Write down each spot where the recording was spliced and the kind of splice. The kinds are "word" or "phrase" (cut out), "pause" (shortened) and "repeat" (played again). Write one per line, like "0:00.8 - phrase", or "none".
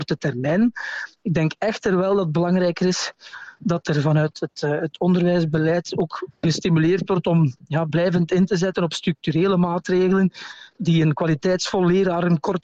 none